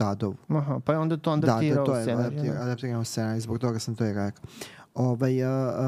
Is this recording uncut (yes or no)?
yes